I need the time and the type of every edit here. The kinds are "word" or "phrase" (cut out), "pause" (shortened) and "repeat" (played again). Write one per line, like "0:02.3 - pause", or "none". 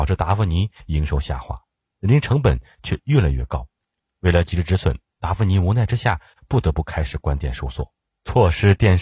none